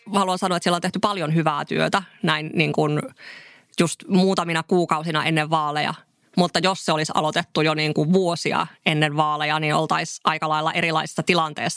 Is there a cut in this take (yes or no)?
no